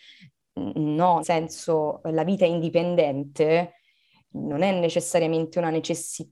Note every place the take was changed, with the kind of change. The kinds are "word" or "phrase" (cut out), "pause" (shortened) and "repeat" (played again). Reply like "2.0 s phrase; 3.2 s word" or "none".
1.2 s word; 4.3 s word